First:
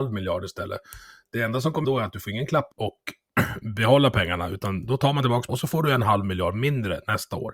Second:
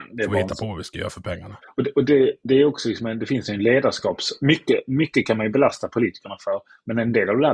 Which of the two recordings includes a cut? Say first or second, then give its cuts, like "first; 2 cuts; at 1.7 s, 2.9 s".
first; 3 cuts; at 1.8 s, 2.7 s, 5.5 s